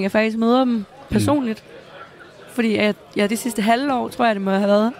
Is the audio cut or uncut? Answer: uncut